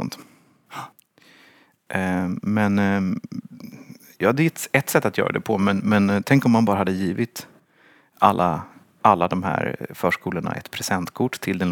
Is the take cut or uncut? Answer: uncut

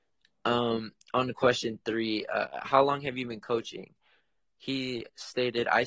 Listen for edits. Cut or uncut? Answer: uncut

